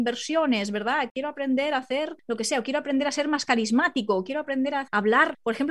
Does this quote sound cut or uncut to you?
uncut